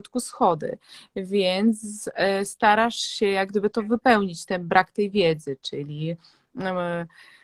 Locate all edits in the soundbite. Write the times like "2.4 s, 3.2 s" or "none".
none